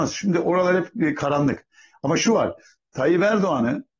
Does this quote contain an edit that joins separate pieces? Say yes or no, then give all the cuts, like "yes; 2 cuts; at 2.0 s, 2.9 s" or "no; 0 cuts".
no; 0 cuts